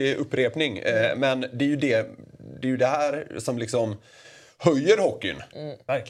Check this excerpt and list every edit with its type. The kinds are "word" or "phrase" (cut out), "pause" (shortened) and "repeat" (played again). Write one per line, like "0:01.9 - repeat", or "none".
none